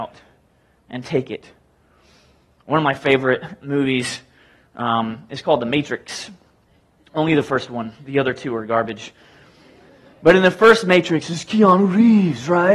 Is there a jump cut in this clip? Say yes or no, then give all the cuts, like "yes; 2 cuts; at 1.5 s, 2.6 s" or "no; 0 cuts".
no; 0 cuts